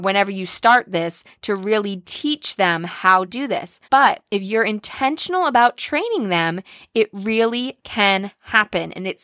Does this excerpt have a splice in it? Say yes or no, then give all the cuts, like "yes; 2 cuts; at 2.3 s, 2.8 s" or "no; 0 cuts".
yes; 2 cuts; at 3.3 s, 3.8 s